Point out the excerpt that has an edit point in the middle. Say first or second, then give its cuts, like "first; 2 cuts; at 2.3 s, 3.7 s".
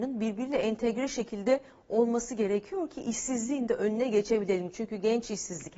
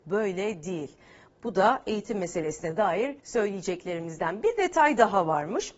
second; 1 cut; at 3.2 s